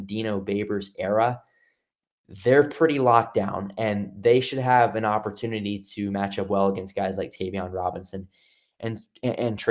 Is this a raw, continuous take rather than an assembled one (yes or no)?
yes